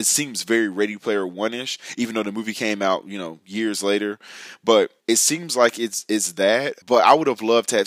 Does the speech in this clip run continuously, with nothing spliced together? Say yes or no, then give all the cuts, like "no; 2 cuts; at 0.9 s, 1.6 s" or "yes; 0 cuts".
no; 2 cuts; at 5.0 s, 6.8 s